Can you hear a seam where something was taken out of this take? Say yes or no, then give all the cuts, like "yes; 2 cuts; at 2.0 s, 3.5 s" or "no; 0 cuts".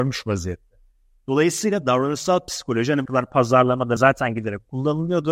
yes; 2 cuts; at 3.1 s, 4.0 s